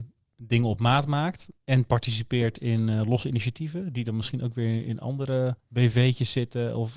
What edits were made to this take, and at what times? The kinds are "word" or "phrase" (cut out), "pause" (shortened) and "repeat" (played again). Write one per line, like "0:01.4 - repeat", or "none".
0:01.6 - pause
0:05.6 - pause